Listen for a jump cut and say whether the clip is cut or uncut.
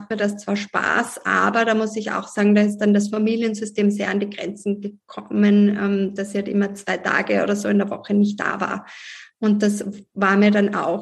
uncut